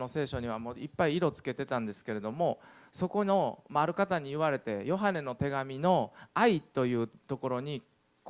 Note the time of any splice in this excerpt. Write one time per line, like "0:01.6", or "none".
0:07.2